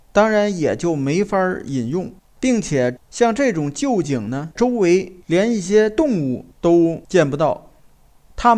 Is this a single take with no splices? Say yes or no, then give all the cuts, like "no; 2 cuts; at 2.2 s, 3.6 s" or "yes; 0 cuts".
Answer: no; 3 cuts; at 2.2 s, 3.0 s, 6.5 s